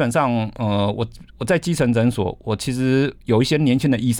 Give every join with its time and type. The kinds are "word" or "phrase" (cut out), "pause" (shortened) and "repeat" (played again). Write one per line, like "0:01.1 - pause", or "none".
0:01.3 - pause